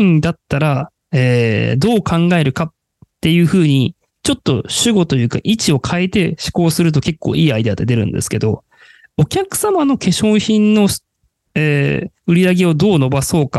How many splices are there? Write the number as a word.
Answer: zero